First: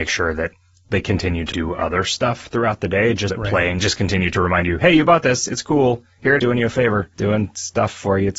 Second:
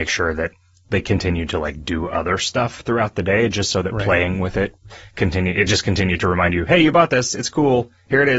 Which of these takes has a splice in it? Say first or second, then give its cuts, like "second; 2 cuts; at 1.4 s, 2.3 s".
first; 5 cuts; at 1.5 s, 3.3 s, 3.8 s, 6.4 s, 7.1 s